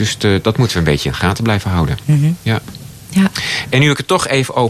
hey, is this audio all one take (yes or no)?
yes